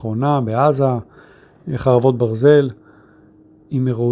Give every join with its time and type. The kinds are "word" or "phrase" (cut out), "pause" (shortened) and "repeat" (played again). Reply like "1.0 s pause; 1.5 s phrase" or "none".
none